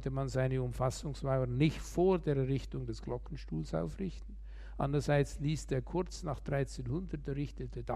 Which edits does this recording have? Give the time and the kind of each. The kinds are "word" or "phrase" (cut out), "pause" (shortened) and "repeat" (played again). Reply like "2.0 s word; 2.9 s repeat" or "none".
none